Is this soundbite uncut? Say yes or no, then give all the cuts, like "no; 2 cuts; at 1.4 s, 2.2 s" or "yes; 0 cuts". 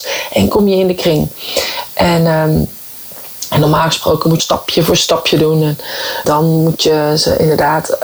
no; 2 cuts; at 4.4 s, 6.2 s